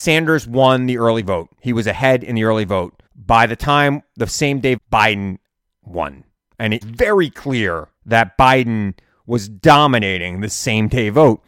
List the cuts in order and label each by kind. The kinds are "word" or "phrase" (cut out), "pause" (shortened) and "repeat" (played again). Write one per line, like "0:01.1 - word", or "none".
0:01.5 - pause
0:03.1 - pause
0:04.8 - phrase
0:06.8 - phrase
0:08.0 - pause